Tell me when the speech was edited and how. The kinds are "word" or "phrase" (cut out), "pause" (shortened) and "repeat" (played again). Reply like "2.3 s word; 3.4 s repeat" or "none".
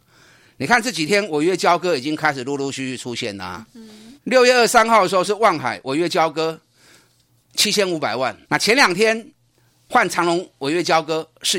4.2 s pause; 8.4 s pause